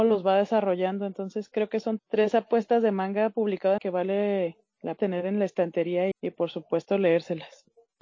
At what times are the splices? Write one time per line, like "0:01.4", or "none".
0:02.0
0:03.8
0:05.0
0:06.1